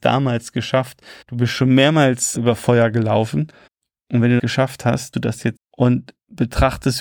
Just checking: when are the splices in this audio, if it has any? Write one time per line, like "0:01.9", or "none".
0:01.2
0:02.4
0:03.7
0:04.4
0:05.1
0:05.6